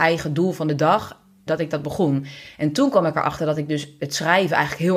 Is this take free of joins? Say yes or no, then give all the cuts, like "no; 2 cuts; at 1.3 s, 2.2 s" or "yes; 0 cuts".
no; 1 cut; at 1.5 s